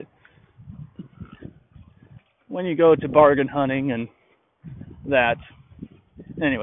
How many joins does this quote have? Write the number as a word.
zero